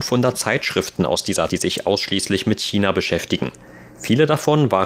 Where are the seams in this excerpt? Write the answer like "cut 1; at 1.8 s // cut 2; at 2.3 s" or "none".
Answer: cut 1; at 1.5 s